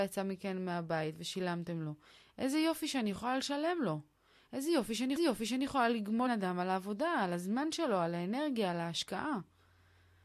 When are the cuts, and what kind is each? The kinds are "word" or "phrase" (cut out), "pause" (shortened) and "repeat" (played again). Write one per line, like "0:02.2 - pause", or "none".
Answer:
0:05.2 - repeat
0:06.3 - word